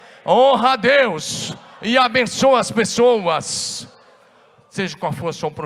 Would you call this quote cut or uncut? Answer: uncut